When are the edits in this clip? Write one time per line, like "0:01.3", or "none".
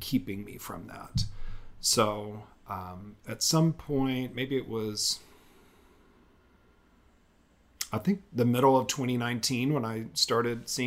none